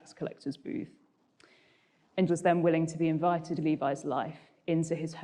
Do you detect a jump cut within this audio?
yes; 2 cuts; at 2.3 s, 3.6 s

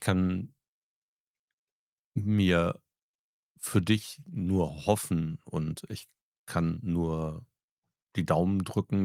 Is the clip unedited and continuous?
yes; 0 cuts

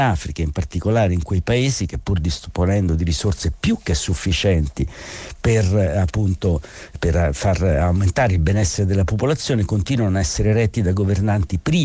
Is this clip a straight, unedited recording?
yes; 0 cuts

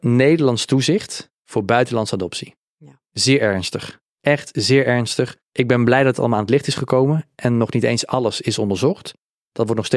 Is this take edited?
yes; 2 cuts; at 1.4 s, 5.4 s

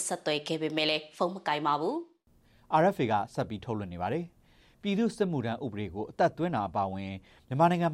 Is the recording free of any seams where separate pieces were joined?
yes; 0 cuts

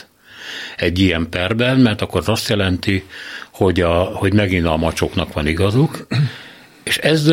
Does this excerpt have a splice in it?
no; 0 cuts

